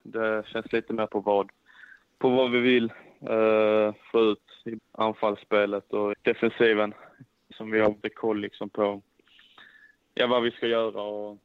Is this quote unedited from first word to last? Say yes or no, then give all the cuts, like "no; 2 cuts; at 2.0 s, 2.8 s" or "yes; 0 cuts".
no; 5 cuts; at 1.1 s, 4.8 s, 6.1 s, 7.5 s, 8.0 s